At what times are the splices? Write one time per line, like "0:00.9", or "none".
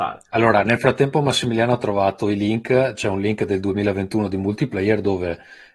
none